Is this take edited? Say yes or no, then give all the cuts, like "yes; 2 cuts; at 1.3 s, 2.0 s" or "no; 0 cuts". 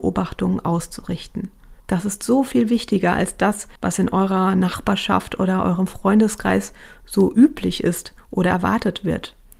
yes; 2 cuts; at 1.8 s, 3.8 s